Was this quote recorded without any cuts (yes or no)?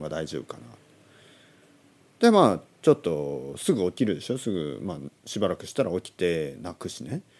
no